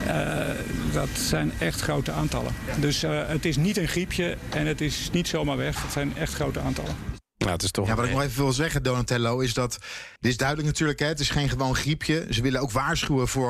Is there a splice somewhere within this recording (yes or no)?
yes